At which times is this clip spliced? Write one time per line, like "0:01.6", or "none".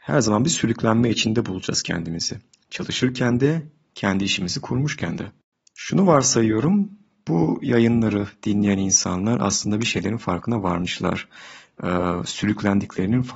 none